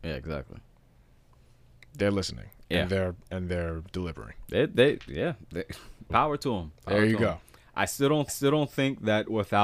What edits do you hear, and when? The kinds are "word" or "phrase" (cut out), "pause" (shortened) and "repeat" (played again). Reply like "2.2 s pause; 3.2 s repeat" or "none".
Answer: 6.1 s word; 8.3 s repeat